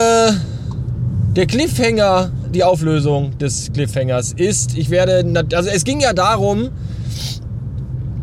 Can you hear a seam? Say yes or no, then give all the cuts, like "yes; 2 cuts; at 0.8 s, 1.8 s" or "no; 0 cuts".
no; 0 cuts